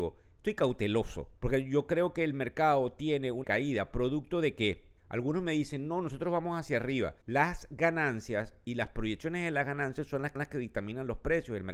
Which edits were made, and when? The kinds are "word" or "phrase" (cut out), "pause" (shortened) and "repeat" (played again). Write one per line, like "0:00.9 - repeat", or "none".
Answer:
0:01.4 - pause
0:03.4 - phrase
0:05.0 - pause
0:07.2 - pause
0:10.4 - repeat